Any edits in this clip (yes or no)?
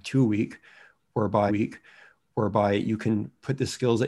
yes